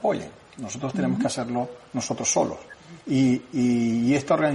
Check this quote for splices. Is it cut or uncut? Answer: cut